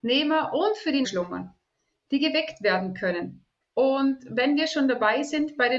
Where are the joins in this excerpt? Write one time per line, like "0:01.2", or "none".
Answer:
0:01.0
0:03.6